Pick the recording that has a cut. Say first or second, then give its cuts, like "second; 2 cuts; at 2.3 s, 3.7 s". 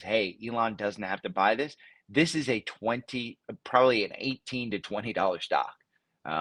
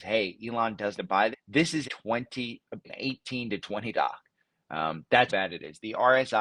second; 6 cuts; at 1.0 s, 1.3 s, 1.8 s, 2.8 s, 3.9 s, 5.3 s